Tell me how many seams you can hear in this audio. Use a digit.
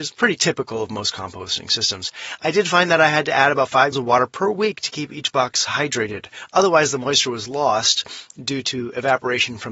1